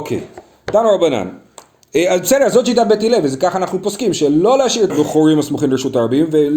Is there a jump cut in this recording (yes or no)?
yes